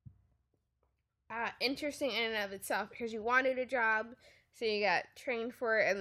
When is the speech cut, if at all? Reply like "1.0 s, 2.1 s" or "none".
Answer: none